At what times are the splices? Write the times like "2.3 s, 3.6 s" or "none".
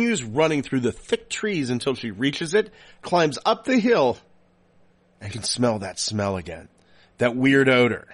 5.3 s